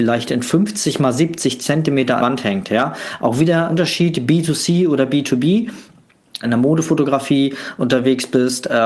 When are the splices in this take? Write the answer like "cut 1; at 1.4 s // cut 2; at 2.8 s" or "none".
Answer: cut 1; at 2.2 s // cut 2; at 3.7 s // cut 3; at 6.4 s